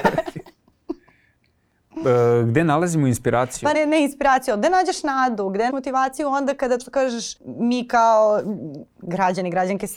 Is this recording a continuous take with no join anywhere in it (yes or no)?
no